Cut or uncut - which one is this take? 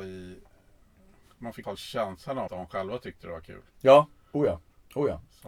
cut